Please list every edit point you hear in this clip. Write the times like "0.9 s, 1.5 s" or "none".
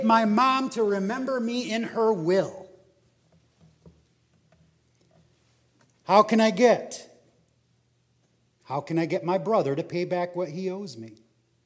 none